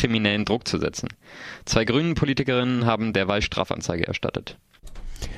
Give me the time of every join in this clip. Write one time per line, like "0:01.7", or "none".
none